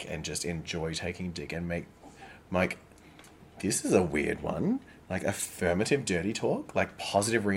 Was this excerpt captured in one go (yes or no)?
yes